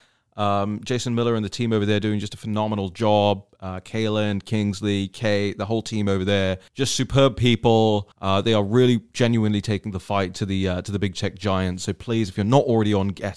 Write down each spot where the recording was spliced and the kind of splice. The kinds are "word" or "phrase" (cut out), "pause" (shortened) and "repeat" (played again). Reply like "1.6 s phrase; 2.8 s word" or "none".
6.7 s pause; 8.1 s pause